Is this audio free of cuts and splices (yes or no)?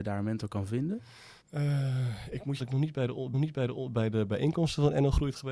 no